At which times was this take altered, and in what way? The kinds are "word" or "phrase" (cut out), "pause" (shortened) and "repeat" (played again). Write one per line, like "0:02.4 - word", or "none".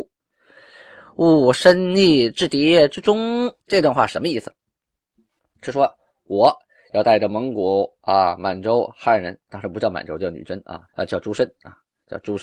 0:03.6 - pause
0:10.9 - pause